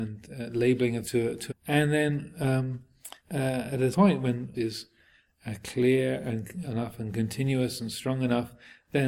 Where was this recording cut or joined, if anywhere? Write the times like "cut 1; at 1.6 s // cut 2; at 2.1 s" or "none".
cut 1; at 1.0 s // cut 2; at 1.5 s // cut 3; at 3.2 s // cut 4; at 3.9 s // cut 5; at 4.5 s // cut 6; at 6.6 s